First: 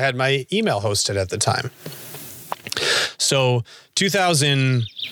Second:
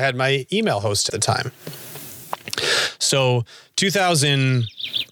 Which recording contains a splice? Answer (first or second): second